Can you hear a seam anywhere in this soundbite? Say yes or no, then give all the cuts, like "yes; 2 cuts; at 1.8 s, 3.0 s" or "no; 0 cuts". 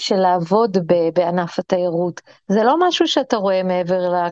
no; 0 cuts